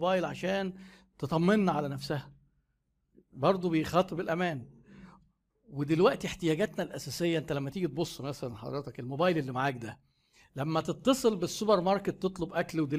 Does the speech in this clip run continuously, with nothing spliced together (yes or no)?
yes